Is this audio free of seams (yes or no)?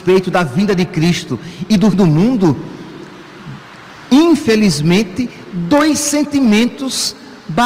no